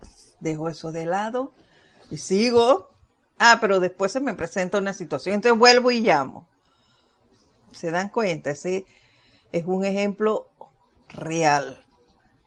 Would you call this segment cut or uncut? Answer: uncut